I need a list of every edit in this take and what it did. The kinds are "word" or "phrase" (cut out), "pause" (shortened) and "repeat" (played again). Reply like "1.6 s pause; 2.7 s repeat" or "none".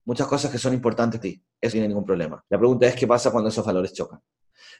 1.2 s word; 1.7 s word; 2.5 s pause